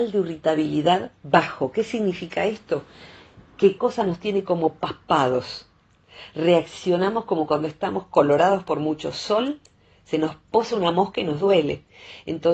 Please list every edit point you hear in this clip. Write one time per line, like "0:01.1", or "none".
0:03.8